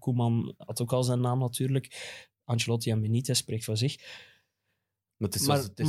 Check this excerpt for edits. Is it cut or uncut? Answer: uncut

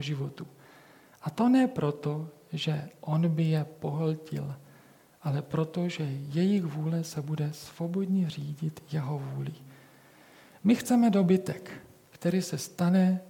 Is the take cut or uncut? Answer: uncut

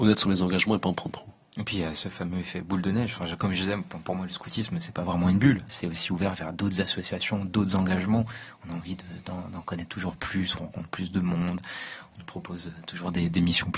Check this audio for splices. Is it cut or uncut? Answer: uncut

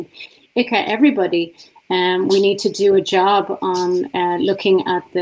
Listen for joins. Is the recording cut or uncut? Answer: uncut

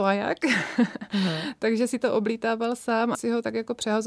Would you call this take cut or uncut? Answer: cut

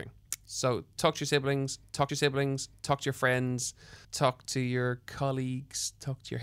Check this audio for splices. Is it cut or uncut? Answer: cut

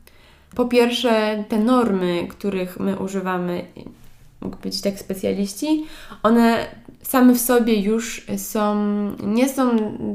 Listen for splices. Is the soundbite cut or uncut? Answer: uncut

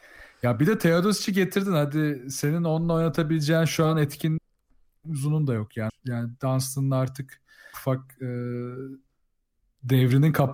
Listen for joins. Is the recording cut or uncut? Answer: cut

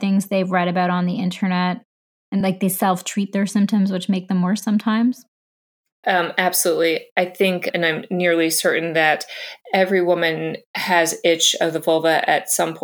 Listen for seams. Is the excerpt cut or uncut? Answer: uncut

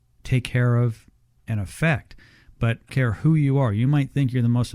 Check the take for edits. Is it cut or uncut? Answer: cut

